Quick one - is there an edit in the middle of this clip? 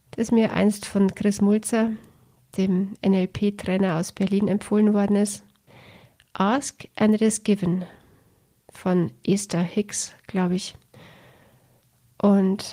no; 0 cuts

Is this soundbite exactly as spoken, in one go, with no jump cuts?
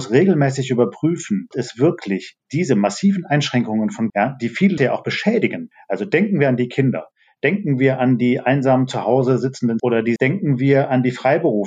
no; 5 cuts; at 1.5 s, 4.1 s, 4.8 s, 9.8 s, 10.2 s

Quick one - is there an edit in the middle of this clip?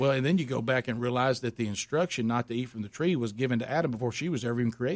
no; 0 cuts

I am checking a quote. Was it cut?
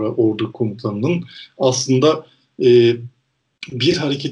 no; 0 cuts

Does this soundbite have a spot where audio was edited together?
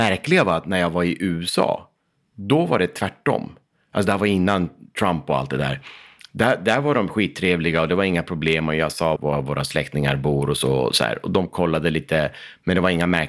yes; 1 cut; at 9.2 s

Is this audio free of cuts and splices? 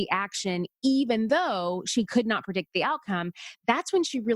yes; 0 cuts

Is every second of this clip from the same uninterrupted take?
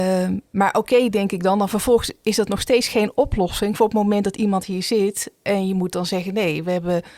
yes; 0 cuts

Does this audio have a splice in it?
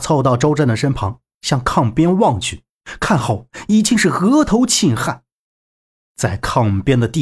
no; 0 cuts

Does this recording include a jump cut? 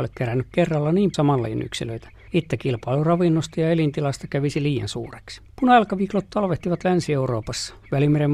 yes; 3 cuts; at 1.1 s, 2.3 s, 5.5 s

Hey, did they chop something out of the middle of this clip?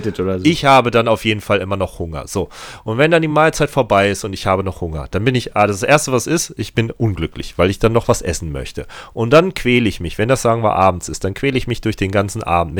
no; 0 cuts

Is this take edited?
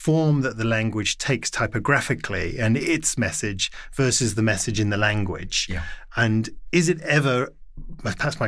no; 0 cuts

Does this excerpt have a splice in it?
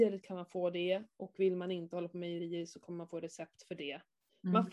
no; 0 cuts

